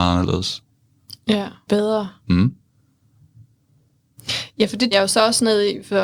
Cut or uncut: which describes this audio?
cut